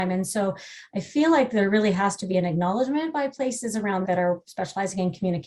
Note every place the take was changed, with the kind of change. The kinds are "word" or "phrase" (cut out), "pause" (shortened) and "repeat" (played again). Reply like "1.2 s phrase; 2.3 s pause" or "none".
4.0 s word